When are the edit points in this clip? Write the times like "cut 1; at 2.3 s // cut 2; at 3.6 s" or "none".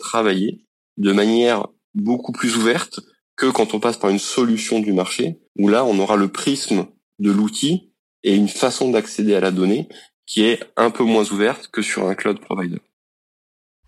cut 1; at 5.5 s